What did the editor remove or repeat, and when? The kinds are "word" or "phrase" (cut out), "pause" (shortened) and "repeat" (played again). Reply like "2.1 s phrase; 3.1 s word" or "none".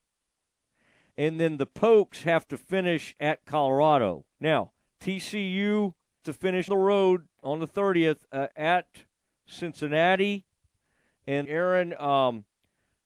4.3 s pause; 6.2 s word; 6.7 s word; 8.5 s pause; 11.4 s word